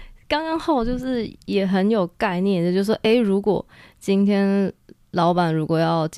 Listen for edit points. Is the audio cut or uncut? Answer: uncut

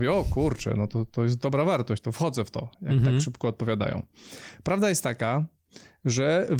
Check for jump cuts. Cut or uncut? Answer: cut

